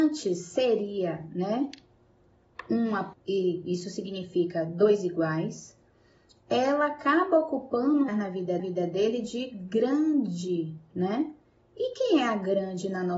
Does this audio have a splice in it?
yes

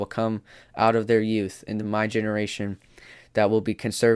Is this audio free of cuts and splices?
yes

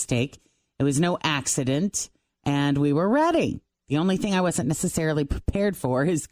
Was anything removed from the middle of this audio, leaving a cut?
no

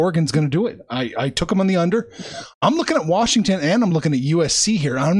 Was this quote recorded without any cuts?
yes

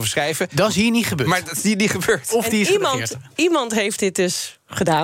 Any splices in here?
no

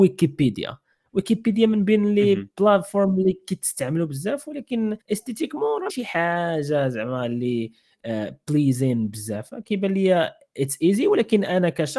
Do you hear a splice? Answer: yes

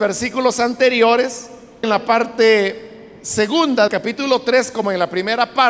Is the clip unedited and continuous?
no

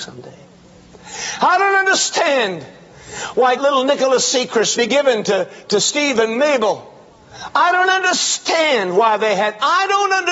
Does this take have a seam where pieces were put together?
yes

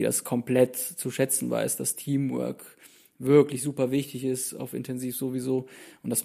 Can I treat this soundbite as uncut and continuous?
yes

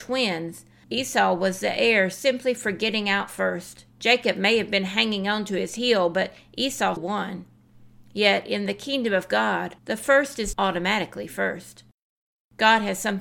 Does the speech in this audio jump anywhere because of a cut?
yes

